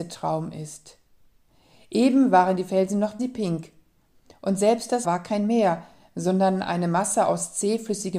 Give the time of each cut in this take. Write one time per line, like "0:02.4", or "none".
0:03.2
0:05.0